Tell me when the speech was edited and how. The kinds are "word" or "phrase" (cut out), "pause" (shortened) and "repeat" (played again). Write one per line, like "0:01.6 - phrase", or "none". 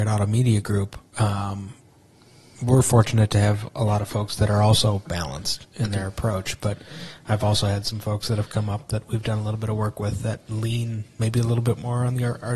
none

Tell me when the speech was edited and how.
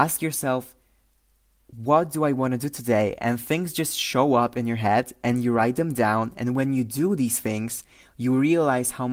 none

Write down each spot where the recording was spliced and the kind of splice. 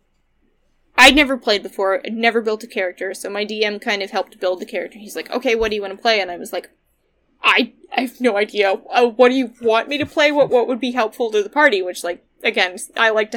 none

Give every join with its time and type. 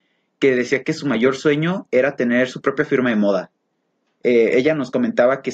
none

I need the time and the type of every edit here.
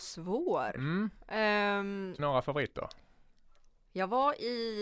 0:02.2 - word

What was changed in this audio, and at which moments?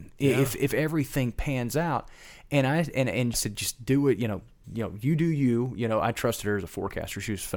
0:03.3 - word
0:04.6 - word

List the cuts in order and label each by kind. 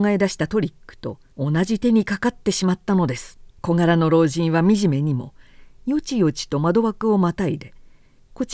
0:01.3 - pause
0:03.5 - pause

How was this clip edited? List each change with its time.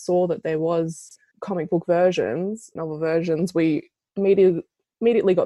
0:01.3 - word
0:02.8 - word

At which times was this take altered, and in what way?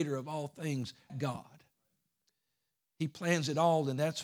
0:01.1 - word

